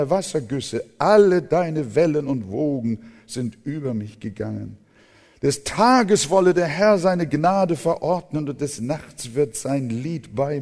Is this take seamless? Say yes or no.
yes